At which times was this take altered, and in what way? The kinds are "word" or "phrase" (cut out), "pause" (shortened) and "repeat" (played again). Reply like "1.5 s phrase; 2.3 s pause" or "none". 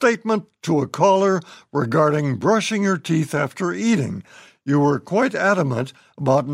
none